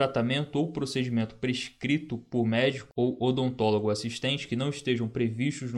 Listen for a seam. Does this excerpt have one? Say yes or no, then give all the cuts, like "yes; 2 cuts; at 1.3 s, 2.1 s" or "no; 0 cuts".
no; 0 cuts